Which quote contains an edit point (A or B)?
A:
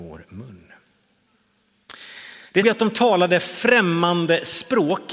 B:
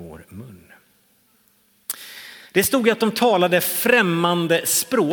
A